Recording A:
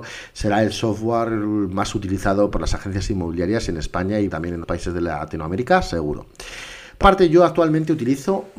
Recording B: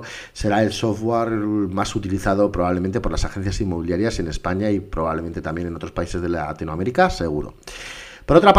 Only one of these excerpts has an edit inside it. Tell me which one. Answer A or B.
A